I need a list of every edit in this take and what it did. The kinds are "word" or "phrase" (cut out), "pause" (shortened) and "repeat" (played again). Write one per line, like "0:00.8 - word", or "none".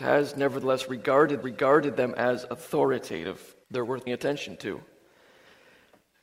0:01.4 - repeat
0:03.6 - pause
0:04.1 - word